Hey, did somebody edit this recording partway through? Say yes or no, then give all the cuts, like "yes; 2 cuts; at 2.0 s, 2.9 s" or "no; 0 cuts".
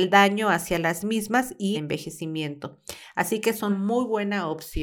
yes; 2 cuts; at 1.7 s, 3.7 s